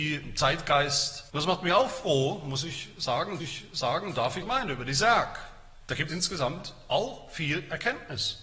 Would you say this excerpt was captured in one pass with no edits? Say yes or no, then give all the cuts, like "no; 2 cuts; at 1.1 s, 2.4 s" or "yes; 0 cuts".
no; 4 cuts; at 1.3 s, 3.4 s, 4.4 s, 6.1 s